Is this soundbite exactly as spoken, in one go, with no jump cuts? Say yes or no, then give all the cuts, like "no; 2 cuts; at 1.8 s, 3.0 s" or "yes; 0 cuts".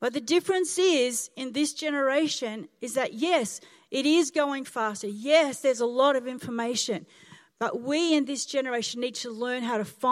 yes; 0 cuts